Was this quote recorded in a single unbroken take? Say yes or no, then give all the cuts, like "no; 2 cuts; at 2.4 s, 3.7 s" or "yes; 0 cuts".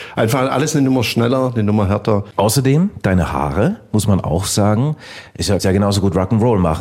no; 1 cut; at 5.6 s